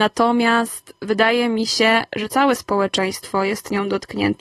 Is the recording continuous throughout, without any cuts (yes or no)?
yes